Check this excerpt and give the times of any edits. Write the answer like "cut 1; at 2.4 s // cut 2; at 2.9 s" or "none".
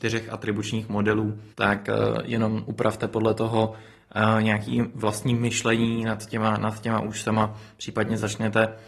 cut 1; at 1.5 s